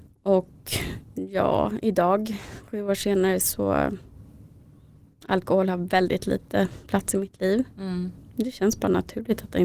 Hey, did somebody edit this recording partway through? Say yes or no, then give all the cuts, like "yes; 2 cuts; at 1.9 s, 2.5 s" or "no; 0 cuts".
no; 0 cuts